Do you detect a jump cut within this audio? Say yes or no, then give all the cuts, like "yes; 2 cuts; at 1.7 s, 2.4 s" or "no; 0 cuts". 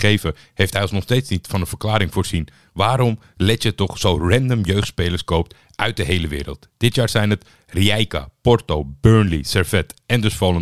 no; 0 cuts